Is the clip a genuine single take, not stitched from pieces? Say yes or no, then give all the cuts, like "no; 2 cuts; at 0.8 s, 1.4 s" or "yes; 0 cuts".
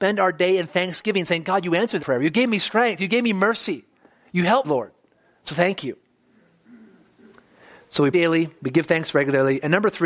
no; 3 cuts; at 2.0 s, 4.6 s, 8.1 s